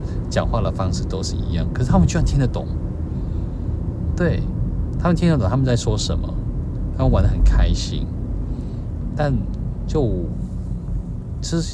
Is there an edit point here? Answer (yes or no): yes